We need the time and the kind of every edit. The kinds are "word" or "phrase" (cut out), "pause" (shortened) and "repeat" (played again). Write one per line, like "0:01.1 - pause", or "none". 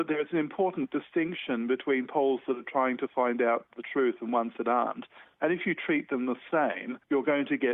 none